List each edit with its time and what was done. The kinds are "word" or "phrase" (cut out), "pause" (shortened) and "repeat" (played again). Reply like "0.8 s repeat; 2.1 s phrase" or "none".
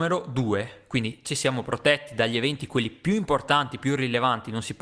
none